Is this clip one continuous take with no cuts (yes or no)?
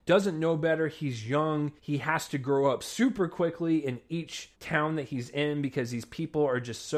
no